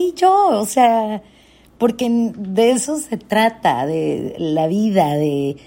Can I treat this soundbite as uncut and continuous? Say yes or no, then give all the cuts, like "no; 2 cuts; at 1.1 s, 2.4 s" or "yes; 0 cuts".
yes; 0 cuts